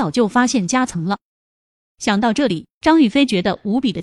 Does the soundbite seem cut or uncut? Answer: uncut